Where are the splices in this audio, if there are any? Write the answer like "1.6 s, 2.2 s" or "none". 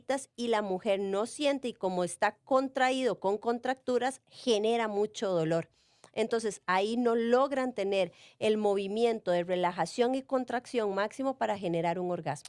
none